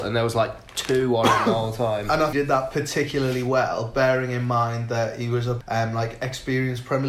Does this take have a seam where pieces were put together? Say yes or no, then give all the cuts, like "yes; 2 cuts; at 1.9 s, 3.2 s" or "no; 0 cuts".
yes; 2 cuts; at 2.3 s, 5.6 s